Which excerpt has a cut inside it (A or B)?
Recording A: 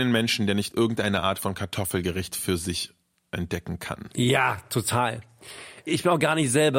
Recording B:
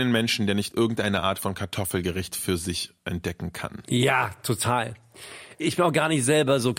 B